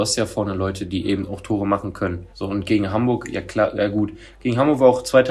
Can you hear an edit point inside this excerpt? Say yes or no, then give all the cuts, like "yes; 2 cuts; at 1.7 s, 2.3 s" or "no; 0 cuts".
yes; 1 cut; at 2.3 s